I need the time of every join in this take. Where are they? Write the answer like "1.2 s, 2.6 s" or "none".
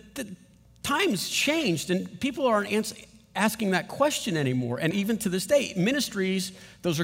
4.9 s